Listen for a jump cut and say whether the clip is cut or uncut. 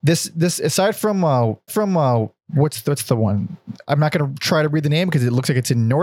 cut